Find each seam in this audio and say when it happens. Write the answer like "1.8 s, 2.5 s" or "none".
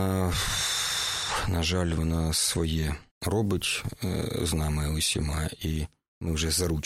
3.1 s